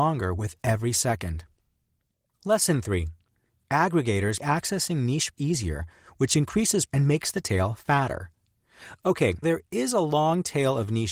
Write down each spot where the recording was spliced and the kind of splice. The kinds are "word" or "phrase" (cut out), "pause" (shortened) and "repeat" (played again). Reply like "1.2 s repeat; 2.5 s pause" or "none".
4.4 s word; 5.3 s word; 6.9 s word; 9.4 s word